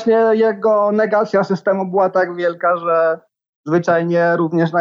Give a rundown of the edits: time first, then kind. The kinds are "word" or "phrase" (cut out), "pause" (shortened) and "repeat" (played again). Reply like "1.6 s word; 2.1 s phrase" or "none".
none